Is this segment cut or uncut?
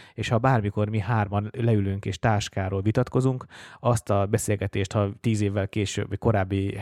uncut